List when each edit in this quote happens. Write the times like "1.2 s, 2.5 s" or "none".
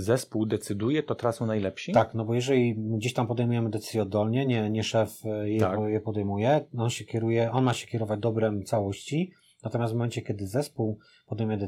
none